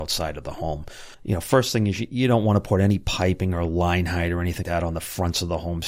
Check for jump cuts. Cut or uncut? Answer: cut